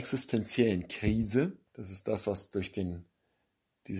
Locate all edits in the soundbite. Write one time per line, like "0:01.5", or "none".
0:01.7